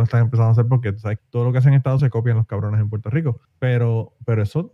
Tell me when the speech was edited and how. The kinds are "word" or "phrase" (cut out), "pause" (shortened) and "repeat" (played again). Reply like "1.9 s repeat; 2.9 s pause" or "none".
1.2 s word; 2.0 s word; 3.4 s pause